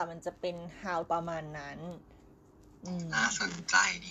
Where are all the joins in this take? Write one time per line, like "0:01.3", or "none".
0:01.1